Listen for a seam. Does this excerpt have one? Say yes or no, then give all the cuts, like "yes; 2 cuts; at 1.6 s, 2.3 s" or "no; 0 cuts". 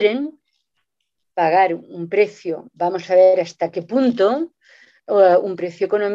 no; 0 cuts